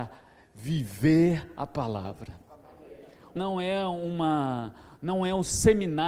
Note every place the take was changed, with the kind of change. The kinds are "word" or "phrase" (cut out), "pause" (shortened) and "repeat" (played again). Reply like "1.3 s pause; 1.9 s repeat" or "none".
3.4 s word